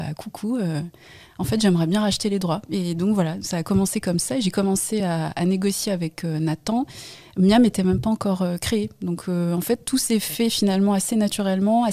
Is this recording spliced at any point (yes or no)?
no